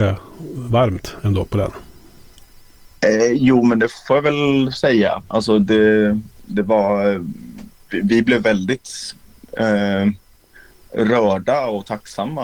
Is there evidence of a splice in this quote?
no; 0 cuts

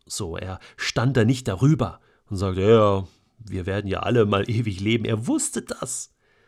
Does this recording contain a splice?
no; 0 cuts

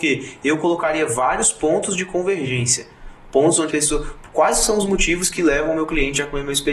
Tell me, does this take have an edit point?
yes; 1 cut; at 3.7 s

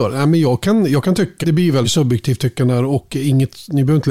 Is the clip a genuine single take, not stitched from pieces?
no; 2 cuts; at 1.4 s, 1.8 s

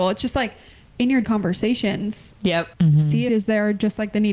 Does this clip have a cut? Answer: yes; 3 cuts; at 1.2 s, 2.7 s, 3.3 s

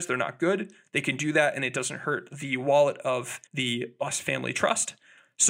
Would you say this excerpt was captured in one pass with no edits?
no; 1 cut; at 3.5 s

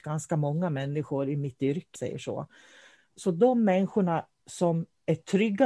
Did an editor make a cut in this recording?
yes; 1 cut; at 1.9 s

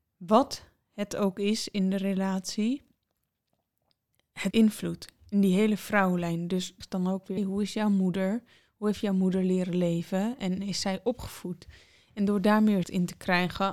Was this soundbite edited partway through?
yes; 4 cuts; at 4.5 s, 6.8 s, 7.4 s, 12.8 s

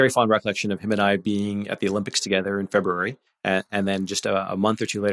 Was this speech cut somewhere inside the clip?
yes; 1 cut; at 3.3 s

